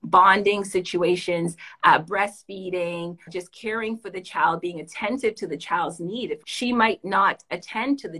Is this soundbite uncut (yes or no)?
no